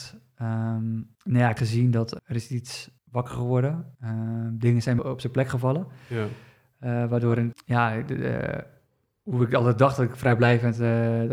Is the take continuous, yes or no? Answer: no